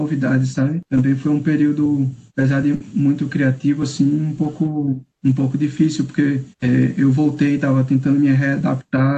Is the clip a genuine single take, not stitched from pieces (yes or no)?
no